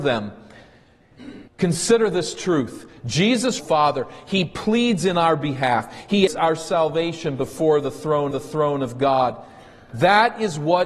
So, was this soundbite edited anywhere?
yes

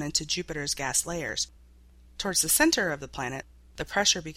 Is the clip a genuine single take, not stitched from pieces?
yes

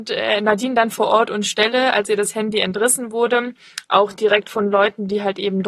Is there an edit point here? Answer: no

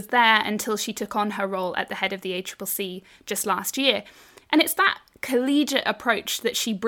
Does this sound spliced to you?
no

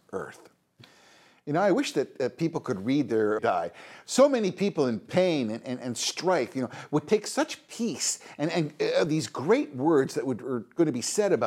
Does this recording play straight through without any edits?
no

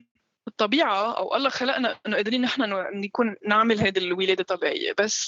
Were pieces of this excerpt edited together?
no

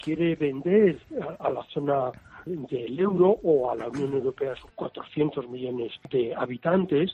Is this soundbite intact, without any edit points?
no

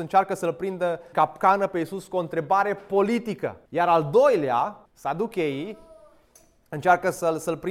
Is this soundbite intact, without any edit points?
no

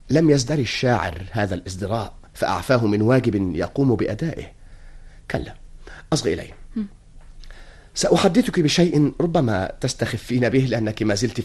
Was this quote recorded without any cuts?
no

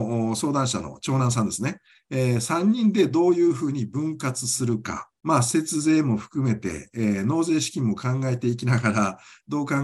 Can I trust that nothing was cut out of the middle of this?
no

